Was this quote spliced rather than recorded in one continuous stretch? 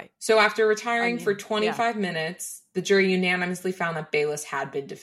no; 0 cuts

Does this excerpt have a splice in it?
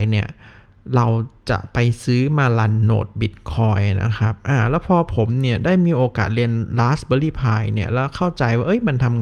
no; 0 cuts

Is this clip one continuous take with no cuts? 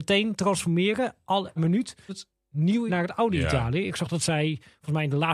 no; 3 cuts; at 1.6 s, 2.1 s, 2.9 s

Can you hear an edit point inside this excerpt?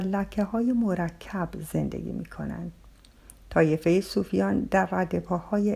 no; 0 cuts

